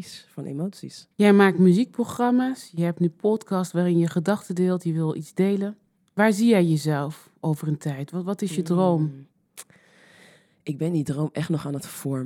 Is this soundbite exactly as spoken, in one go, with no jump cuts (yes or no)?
no